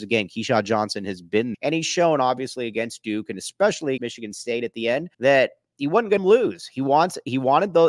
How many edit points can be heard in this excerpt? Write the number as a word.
four